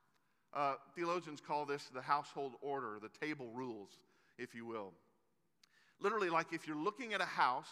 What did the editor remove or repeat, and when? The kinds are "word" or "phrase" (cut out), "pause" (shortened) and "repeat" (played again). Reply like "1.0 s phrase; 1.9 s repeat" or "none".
none